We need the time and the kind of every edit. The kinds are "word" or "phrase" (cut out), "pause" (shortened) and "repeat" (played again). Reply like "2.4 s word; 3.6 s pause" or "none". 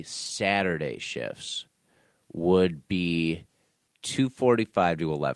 none